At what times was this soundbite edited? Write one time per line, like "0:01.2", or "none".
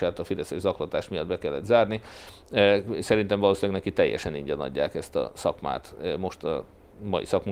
none